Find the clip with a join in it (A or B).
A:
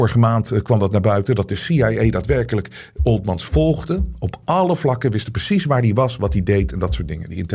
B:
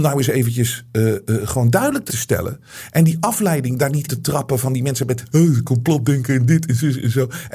B